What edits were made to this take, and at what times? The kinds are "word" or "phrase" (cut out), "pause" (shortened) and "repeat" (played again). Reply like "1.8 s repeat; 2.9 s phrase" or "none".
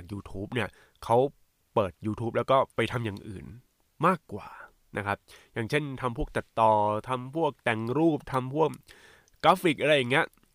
none